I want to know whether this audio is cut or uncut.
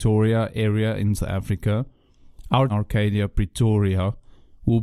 cut